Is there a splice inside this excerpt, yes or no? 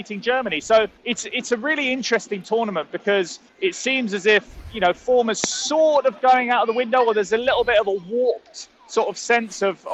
yes